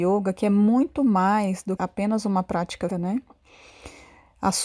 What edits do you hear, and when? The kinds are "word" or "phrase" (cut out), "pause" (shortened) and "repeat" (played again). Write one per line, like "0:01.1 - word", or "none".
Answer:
0:01.8 - word
0:02.9 - word